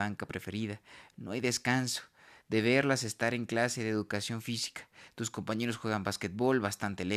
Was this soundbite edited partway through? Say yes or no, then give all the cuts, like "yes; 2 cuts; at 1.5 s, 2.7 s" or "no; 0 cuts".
no; 0 cuts